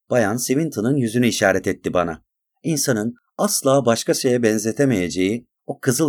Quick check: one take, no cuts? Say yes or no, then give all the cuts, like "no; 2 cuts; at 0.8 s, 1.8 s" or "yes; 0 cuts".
no; 1 cut; at 2.5 s